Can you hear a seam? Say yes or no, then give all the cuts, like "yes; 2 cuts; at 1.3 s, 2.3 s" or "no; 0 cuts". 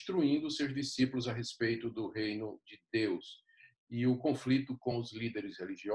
no; 0 cuts